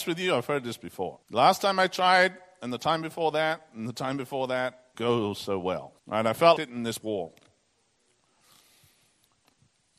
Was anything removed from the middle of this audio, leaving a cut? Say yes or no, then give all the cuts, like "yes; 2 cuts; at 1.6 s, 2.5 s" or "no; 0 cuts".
yes; 5 cuts; at 1.2 s, 4.9 s, 6.0 s, 6.6 s, 7.0 s